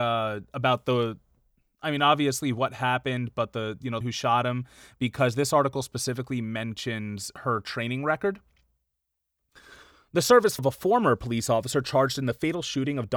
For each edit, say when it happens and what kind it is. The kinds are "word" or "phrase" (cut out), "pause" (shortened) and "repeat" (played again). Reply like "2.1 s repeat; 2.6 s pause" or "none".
4.0 s phrase; 10.6 s word